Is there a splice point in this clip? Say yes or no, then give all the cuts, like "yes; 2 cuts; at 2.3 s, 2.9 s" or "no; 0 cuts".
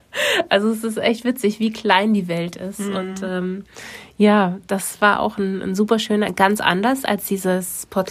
no; 0 cuts